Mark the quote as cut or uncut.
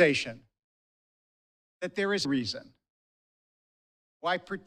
cut